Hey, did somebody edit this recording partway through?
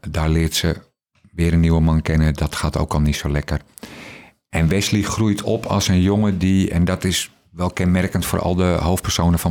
no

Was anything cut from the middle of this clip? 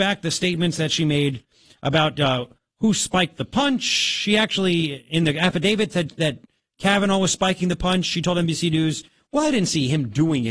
no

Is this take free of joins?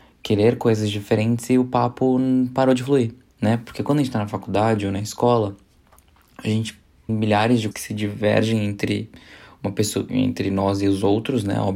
no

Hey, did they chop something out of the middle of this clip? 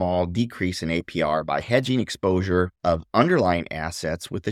yes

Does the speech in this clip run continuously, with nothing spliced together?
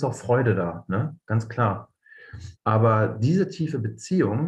no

